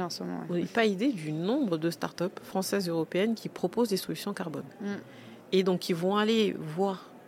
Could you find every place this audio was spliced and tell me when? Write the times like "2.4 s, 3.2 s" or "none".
none